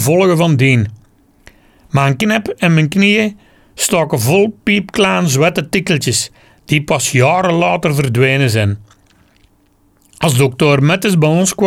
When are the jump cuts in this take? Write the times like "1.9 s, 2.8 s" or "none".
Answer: none